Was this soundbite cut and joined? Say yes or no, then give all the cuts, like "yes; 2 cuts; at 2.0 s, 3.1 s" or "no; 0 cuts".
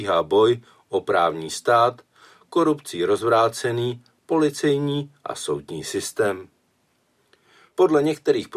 no; 0 cuts